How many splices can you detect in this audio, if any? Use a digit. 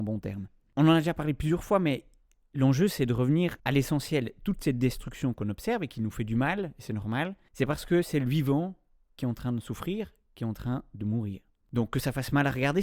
1